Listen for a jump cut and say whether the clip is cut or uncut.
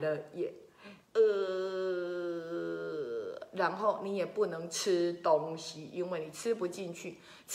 cut